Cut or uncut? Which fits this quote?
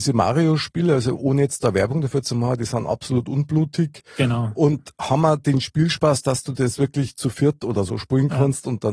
uncut